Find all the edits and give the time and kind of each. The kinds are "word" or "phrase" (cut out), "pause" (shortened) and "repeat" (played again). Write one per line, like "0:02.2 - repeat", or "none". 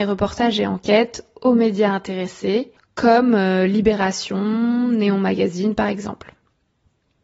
0:02.8 - pause